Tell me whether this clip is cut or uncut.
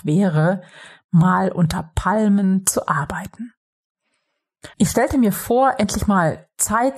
cut